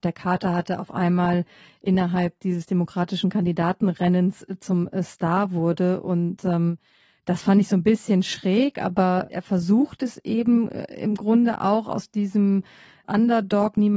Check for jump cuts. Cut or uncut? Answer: uncut